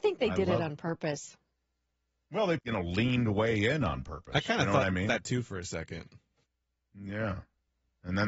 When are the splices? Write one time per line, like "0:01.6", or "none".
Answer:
0:02.6